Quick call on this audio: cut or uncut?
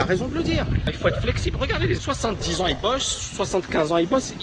cut